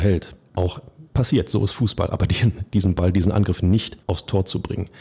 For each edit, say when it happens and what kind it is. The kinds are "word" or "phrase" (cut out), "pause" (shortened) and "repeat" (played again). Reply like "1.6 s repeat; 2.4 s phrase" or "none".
1.1 s pause; 4.0 s pause